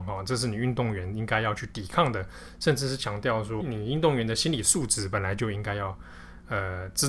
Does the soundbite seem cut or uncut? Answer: cut